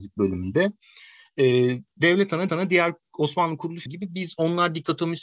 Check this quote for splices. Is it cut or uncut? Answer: cut